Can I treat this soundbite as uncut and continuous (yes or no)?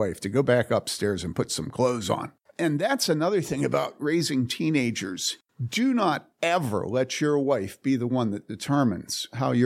yes